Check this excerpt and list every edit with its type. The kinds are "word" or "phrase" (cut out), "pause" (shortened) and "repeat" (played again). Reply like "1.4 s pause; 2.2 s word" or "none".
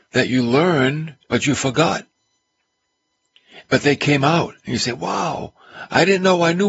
1.2 s pause